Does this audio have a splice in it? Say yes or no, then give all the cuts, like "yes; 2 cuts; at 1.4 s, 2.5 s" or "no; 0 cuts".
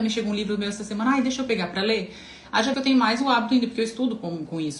yes; 1 cut; at 2.7 s